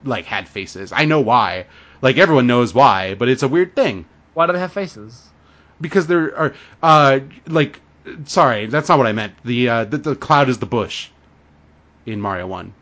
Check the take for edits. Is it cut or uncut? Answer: uncut